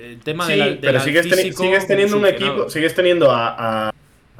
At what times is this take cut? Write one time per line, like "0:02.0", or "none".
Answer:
none